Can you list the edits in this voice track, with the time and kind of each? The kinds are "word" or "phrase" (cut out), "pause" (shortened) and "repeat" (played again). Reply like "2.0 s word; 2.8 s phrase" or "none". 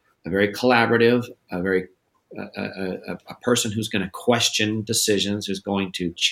2.1 s pause

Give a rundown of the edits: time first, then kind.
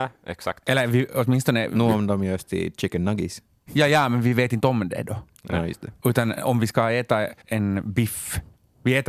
7.4 s pause

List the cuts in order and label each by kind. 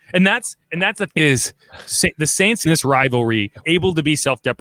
1.1 s word; 2.6 s word; 3.6 s word

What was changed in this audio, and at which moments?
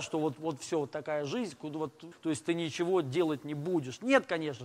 2.1 s word

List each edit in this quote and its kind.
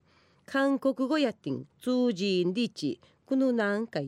1.7 s pause

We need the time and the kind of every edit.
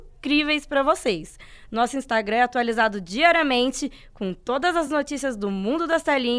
none

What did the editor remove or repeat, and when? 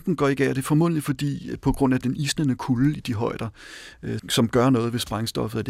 4.2 s word

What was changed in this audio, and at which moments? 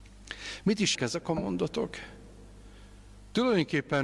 0.9 s word

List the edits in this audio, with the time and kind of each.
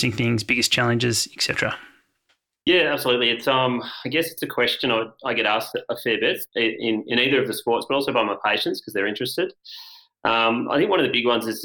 none

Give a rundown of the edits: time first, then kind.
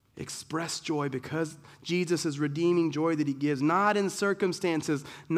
none

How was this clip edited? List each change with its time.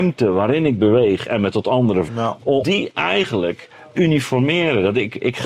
2.1 s word; 2.6 s word; 4.0 s word

